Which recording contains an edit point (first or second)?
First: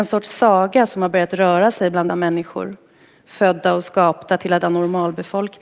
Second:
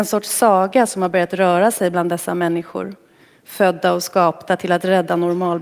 first